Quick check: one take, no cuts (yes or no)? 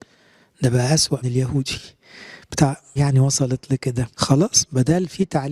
no